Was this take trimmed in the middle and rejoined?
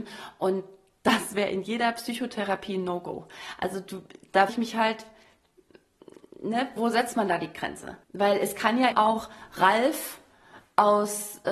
yes; 4 cuts; at 4.5 s, 6.8 s, 8.0 s, 8.9 s

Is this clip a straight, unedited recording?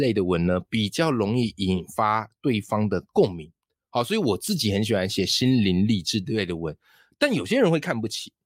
yes; 0 cuts

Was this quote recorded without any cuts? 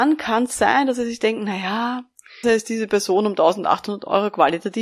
no; 1 cut; at 2.4 s

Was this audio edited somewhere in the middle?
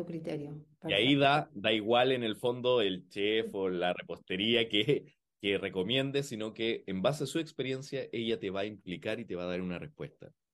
no; 0 cuts

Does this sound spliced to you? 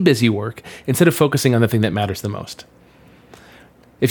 no; 0 cuts

